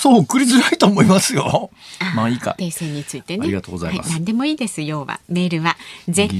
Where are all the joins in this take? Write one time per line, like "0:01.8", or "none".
0:02.6